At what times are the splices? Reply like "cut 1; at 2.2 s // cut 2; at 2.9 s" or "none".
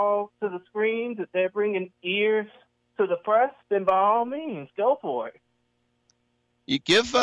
cut 1; at 2.6 s // cut 2; at 3.6 s